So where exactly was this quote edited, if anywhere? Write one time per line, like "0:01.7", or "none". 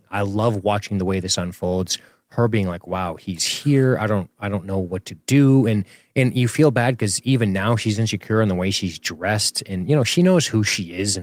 none